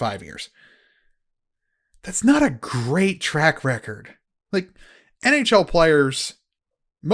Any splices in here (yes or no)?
no